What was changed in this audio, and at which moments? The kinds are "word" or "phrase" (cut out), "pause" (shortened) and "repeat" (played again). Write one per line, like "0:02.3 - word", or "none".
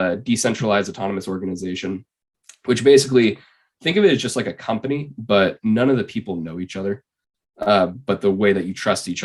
none